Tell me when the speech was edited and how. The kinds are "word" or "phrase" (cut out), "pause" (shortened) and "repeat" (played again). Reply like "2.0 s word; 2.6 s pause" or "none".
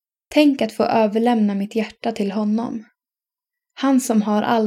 none